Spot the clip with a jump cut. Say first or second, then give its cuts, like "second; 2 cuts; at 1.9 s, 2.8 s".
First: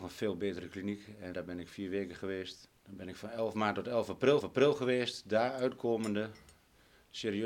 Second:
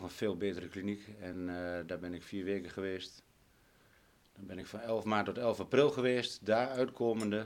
first; 3 cuts; at 1.3 s, 2.8 s, 4.4 s